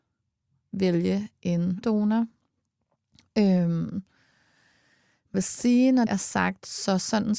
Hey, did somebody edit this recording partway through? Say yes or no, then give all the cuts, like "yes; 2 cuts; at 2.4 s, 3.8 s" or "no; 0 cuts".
yes; 3 cuts; at 1.8 s, 5.3 s, 6.1 s